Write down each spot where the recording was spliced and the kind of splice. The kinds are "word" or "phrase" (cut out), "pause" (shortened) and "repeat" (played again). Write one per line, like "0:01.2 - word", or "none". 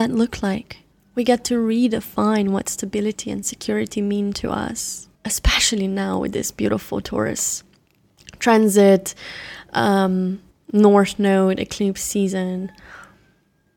0:00.9 - pause
0:05.1 - pause
0:10.5 - pause